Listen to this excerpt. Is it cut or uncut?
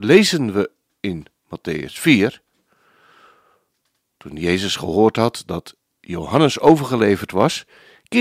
uncut